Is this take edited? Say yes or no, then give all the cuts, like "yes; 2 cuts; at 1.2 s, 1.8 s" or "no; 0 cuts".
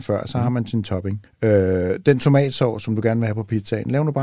yes; 1 cut; at 1.3 s